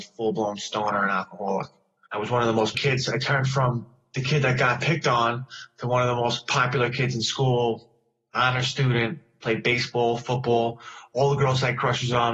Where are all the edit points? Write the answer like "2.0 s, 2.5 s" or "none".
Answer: 2.7 s